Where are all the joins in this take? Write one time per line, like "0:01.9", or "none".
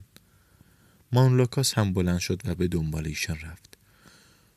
none